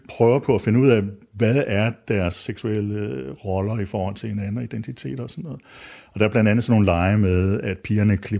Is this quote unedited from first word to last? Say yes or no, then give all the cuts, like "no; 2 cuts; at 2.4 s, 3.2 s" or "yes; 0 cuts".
yes; 0 cuts